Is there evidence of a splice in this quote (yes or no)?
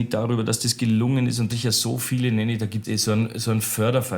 yes